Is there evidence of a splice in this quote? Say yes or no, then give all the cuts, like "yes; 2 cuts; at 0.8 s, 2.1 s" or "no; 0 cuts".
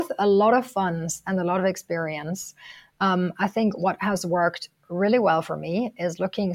no; 0 cuts